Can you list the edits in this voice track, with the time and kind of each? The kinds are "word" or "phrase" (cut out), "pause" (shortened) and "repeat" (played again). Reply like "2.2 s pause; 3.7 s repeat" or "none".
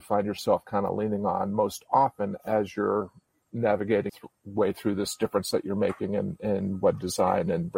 4.1 s word